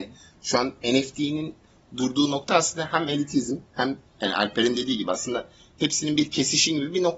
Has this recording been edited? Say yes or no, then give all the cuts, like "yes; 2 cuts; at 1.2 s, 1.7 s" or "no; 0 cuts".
no; 0 cuts